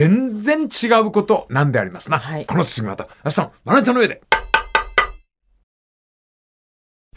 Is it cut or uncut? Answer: uncut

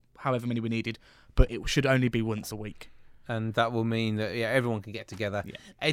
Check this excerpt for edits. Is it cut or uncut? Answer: uncut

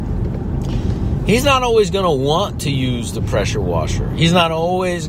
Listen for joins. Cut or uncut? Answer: uncut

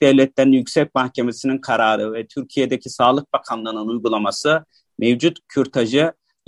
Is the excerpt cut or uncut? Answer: uncut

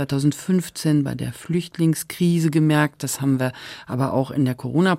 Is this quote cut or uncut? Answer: uncut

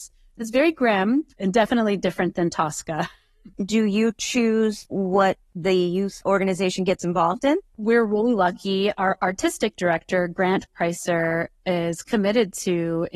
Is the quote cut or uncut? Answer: cut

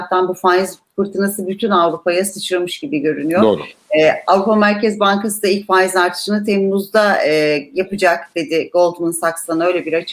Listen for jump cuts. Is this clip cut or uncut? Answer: uncut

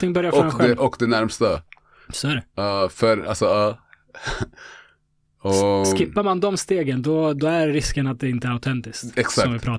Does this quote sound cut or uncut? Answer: uncut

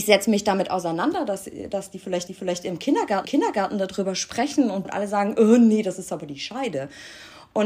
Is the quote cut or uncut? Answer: cut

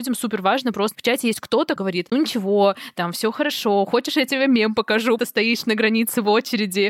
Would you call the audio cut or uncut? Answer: cut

